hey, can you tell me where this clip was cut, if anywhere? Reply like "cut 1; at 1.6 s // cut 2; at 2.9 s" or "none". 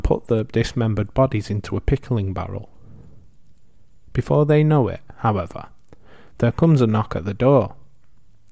none